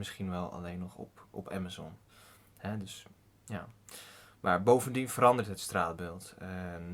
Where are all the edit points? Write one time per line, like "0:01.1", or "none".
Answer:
none